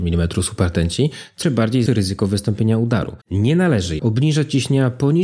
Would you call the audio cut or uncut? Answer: cut